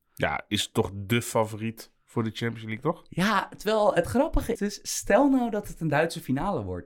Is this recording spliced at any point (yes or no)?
yes